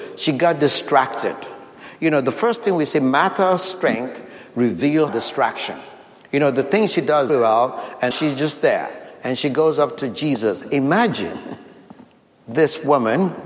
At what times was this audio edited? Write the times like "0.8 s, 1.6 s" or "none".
5.1 s, 7.3 s, 8.1 s